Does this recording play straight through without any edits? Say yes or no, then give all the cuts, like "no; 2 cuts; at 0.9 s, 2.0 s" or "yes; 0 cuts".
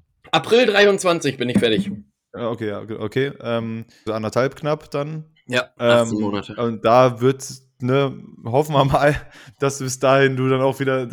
no; 1 cut; at 4.1 s